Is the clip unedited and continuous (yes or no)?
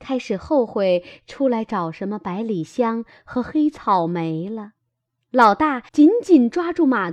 no